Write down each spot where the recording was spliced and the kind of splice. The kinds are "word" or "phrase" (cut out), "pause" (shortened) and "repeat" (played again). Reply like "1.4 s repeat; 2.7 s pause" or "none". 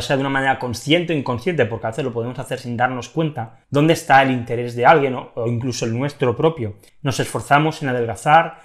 3.6 s pause; 6.9 s pause